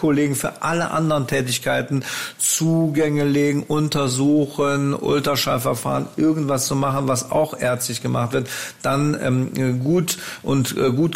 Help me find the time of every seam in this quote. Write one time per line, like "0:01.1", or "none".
none